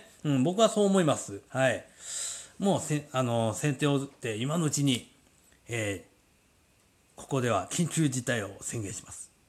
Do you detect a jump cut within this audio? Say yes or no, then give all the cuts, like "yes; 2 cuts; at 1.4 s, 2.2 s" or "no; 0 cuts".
yes; 1 cut; at 1.5 s